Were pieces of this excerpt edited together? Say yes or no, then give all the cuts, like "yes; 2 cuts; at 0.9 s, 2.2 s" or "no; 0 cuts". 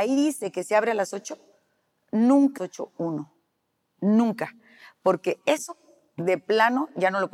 yes; 1 cut; at 2.6 s